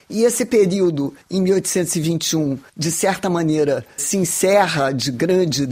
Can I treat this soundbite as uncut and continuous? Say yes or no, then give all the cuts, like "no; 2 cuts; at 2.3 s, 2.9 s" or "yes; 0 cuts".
no; 3 cuts; at 1.2 s, 2.7 s, 4.0 s